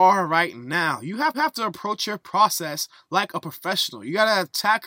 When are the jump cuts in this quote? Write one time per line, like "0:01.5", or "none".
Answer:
0:01.3